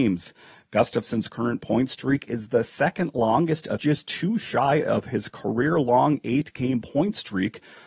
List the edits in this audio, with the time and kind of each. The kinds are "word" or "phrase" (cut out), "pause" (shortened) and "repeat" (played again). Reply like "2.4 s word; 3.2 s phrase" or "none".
3.8 s phrase